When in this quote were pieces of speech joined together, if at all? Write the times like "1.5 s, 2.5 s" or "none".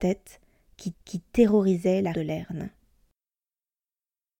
0.9 s, 2.1 s